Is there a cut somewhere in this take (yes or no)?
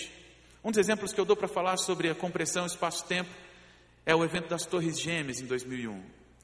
no